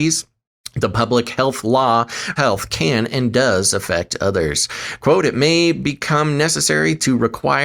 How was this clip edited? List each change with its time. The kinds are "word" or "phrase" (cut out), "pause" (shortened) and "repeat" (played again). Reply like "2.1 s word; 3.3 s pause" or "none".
2.4 s phrase